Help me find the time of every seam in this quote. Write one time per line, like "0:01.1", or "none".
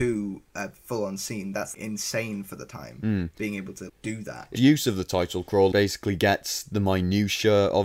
0:01.7
0:03.9
0:04.5
0:05.7